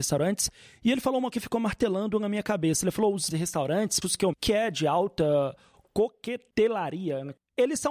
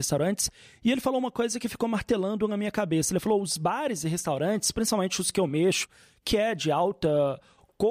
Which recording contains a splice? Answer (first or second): first